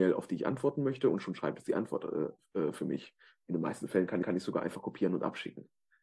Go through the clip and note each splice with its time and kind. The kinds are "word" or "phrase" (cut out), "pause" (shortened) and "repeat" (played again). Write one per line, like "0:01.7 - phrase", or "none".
0:04.2 - repeat